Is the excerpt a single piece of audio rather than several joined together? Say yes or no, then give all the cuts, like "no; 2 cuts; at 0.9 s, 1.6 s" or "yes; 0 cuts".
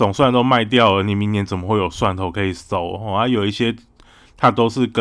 yes; 0 cuts